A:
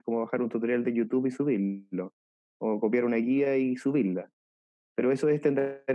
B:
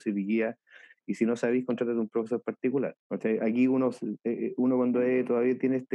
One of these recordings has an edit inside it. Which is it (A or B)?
B